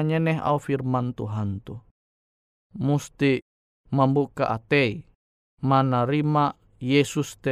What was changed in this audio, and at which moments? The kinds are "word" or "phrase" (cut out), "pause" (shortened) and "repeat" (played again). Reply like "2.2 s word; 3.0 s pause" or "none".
none